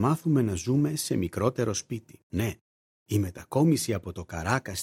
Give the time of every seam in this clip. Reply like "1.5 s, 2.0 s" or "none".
2.2 s